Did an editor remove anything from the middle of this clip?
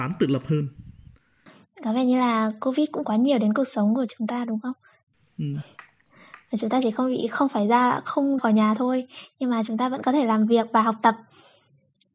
yes; 2 cuts; at 3.0 s, 8.4 s

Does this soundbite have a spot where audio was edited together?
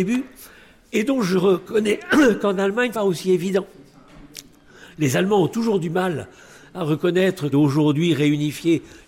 yes; 2 cuts; at 2.9 s, 7.5 s

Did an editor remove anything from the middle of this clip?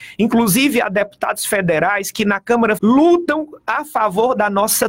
yes; 1 cut; at 2.8 s

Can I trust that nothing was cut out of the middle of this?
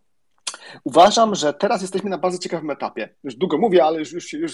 yes; 0 cuts

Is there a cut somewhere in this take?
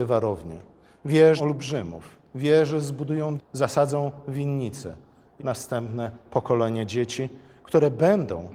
yes; 3 cuts; at 1.4 s, 3.4 s, 5.4 s

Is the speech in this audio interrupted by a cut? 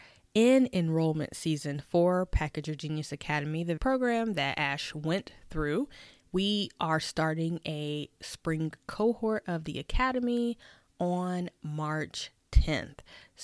yes; 1 cut; at 3.8 s

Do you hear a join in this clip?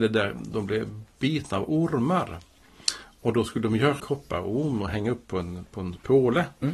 yes; 1 cut; at 4.0 s

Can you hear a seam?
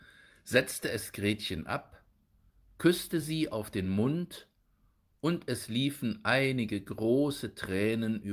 no; 0 cuts

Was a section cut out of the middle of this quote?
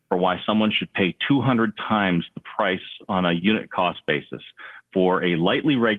no; 0 cuts

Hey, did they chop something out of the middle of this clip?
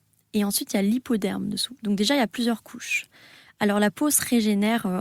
no; 0 cuts

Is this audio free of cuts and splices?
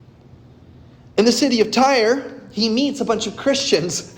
yes; 0 cuts

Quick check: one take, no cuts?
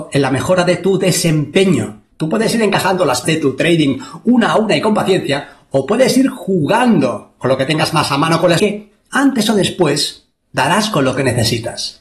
no; 3 cuts; at 2.1 s, 3.2 s, 8.6 s

